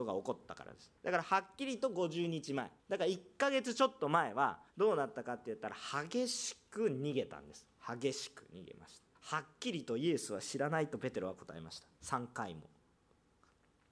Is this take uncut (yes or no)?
no